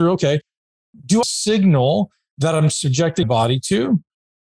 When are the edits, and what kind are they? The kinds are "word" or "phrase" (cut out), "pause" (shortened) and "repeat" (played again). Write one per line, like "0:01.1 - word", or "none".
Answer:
0:01.2 - phrase
0:03.2 - word